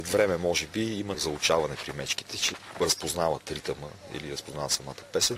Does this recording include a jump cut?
no; 0 cuts

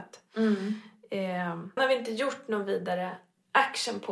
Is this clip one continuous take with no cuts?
no; 1 cut; at 1.8 s

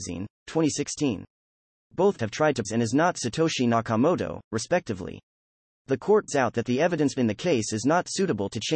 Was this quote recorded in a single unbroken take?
no; 4 cuts; at 2.2 s, 2.6 s, 6.3 s, 7.2 s

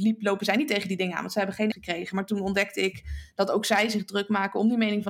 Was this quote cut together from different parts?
yes; 1 cut; at 1.7 s

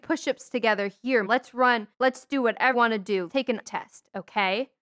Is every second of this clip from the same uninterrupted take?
no; 5 cuts; at 1.3 s, 1.9 s, 2.7 s, 3.3 s, 3.6 s

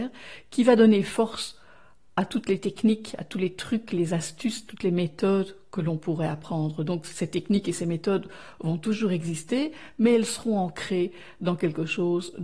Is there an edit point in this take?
no; 0 cuts

